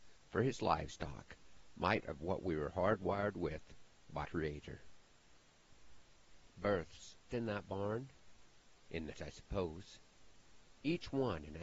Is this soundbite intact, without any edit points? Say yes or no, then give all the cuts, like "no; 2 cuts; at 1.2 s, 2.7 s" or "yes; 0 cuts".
no; 4 cuts; at 2.0 s, 4.2 s, 7.3 s, 9.1 s